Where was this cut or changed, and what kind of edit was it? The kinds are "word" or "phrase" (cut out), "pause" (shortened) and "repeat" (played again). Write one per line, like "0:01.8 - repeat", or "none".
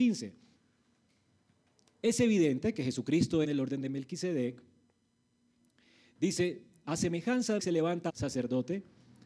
0:03.4 - phrase
0:06.8 - word
0:07.6 - word
0:08.1 - word